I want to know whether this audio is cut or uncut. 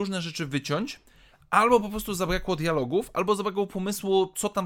uncut